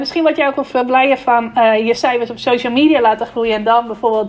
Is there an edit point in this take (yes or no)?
no